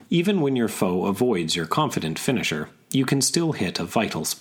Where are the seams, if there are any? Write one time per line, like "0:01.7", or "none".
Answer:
none